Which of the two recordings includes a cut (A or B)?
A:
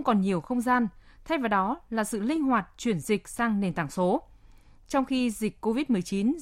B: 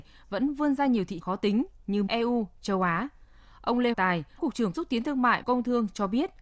B